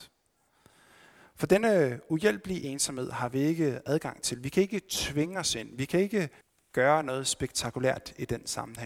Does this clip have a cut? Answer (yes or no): yes